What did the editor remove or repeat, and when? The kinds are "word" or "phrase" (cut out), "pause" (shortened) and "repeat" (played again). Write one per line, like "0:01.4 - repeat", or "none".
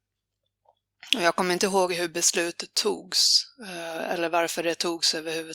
none